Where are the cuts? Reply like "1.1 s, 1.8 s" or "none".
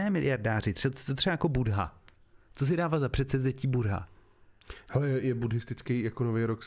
none